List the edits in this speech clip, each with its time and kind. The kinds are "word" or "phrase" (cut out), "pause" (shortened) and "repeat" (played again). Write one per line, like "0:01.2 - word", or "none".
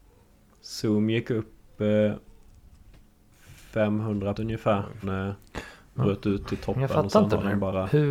0:04.3 - word
0:05.0 - word
0:06.0 - phrase